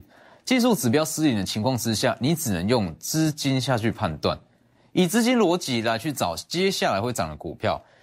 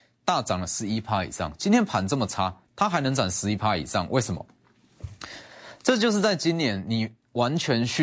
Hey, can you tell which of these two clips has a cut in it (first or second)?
second